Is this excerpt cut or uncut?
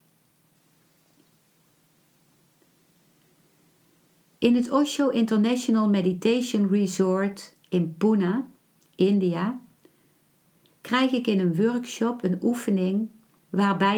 uncut